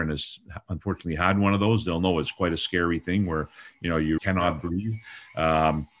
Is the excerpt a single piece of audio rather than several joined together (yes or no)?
no